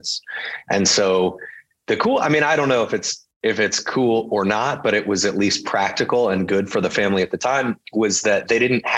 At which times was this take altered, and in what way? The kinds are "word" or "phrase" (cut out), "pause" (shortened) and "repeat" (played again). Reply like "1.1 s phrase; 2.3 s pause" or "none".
none